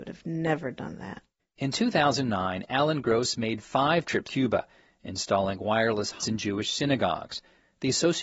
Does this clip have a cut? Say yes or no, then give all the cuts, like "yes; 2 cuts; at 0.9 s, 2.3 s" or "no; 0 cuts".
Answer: yes; 2 cuts; at 4.2 s, 6.2 s